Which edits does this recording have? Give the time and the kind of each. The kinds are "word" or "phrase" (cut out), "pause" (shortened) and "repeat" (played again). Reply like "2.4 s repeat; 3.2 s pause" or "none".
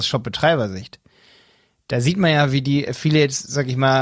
none